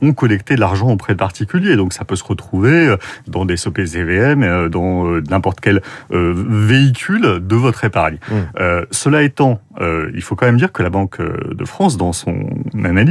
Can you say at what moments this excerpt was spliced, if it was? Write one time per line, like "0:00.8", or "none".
none